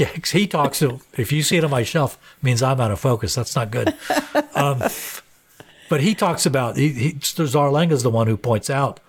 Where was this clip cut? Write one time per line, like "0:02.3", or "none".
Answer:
none